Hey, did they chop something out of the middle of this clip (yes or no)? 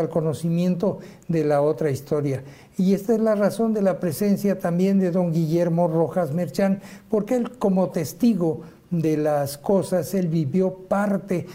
no